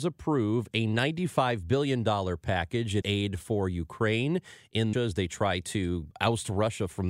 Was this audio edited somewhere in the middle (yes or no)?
yes